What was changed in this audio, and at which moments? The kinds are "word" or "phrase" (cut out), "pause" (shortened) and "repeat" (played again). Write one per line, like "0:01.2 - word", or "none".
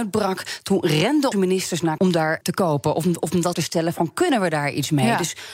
0:01.3 - word
0:02.0 - word
0:02.4 - word
0:03.5 - word